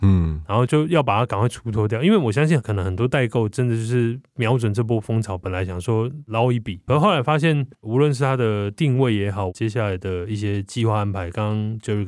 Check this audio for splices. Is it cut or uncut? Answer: cut